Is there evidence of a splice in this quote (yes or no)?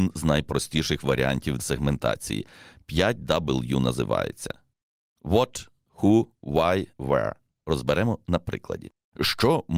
yes